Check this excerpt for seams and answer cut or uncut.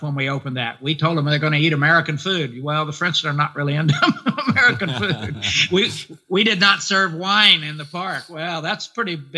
uncut